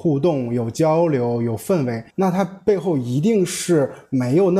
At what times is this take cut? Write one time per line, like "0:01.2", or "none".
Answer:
0:02.1